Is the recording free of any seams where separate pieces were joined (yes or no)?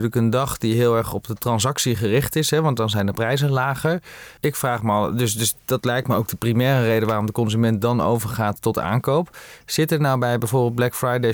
no